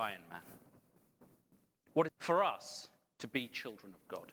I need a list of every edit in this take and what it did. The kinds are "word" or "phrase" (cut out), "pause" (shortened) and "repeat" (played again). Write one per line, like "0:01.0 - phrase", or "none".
0:02.1 - phrase